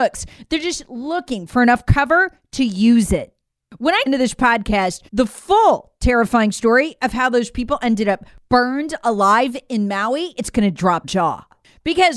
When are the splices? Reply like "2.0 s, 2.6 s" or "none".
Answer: 4.1 s, 5.1 s, 11.0 s